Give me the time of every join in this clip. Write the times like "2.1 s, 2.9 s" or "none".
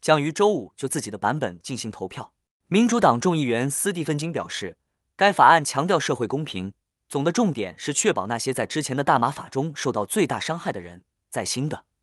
none